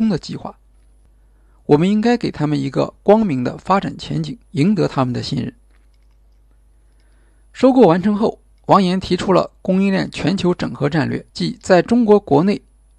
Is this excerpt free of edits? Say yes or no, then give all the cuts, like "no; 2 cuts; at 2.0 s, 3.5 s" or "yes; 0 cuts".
no; 2 cuts; at 4.4 s, 11.3 s